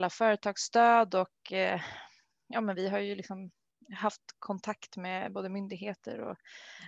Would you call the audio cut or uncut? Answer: uncut